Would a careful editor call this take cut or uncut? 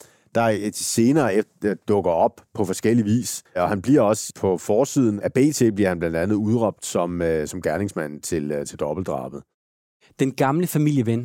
cut